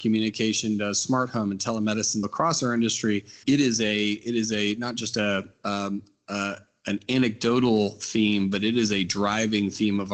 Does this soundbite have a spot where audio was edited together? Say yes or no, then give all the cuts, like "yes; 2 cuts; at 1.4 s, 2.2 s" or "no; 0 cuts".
yes; 2 cuts; at 2.2 s, 3.4 s